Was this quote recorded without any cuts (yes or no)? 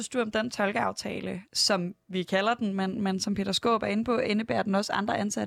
yes